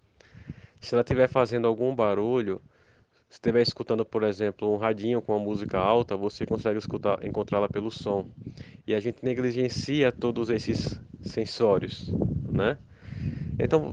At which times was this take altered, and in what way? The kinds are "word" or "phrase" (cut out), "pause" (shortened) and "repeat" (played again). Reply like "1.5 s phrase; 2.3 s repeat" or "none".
none